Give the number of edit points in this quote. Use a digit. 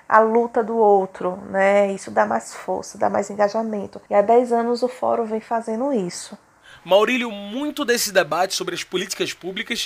1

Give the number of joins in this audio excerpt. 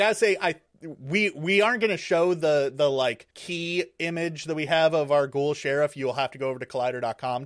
1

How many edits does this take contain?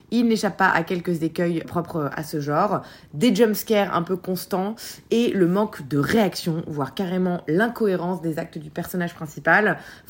1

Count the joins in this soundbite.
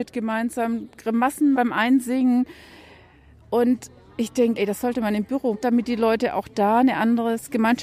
3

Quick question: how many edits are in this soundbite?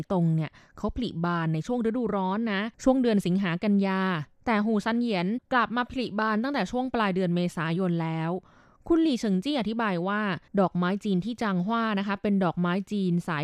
2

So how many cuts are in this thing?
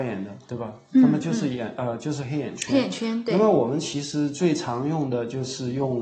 0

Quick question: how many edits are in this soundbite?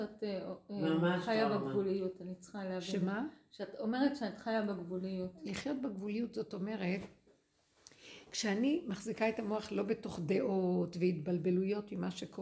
0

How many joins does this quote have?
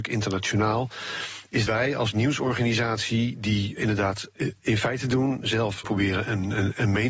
3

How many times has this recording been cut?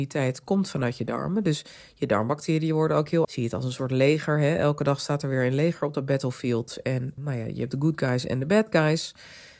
2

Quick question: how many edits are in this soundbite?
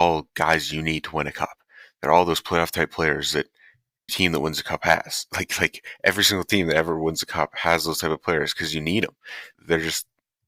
2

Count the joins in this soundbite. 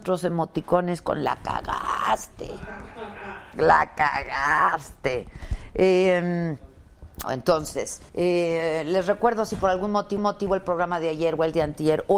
3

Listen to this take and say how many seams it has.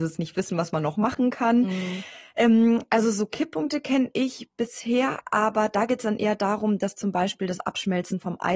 0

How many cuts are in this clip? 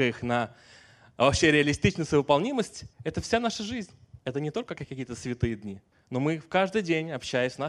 3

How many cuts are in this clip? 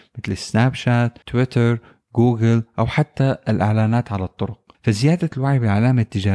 2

